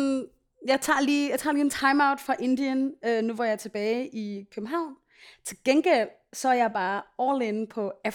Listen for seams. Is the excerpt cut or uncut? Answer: uncut